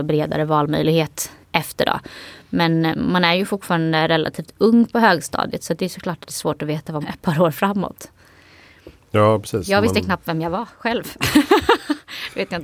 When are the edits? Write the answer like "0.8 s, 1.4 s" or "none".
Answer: 1.4 s, 7.0 s

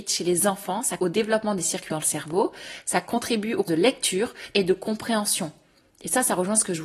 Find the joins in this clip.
1.0 s, 1.9 s, 3.7 s, 4.5 s

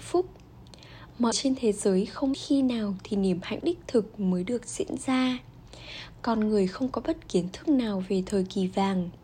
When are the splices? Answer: 1.3 s, 2.3 s, 3.6 s, 7.3 s

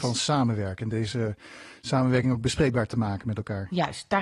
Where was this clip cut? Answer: none

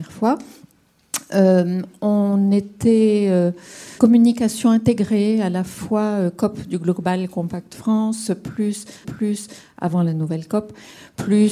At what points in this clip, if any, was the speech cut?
4.0 s, 9.0 s

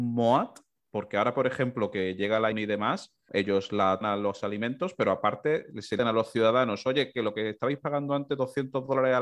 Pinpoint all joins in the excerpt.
2.5 s, 3.3 s, 4.0 s, 6.0 s

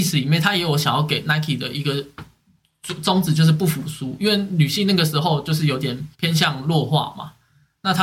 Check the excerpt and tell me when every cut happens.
6.1 s

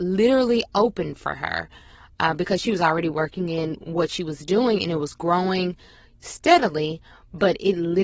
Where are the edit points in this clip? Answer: none

